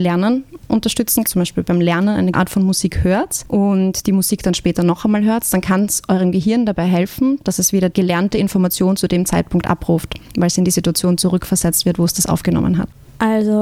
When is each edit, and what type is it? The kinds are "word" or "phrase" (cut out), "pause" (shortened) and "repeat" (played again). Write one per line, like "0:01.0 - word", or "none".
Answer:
0:01.3 - phrase
0:02.3 - word
0:07.9 - word